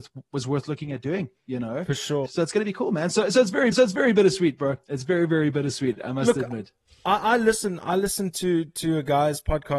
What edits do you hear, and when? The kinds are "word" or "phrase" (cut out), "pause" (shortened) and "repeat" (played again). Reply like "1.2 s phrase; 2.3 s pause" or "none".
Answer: 2.3 s phrase; 3.7 s repeat